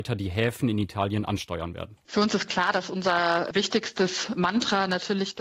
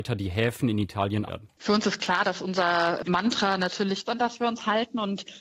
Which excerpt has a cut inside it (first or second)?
second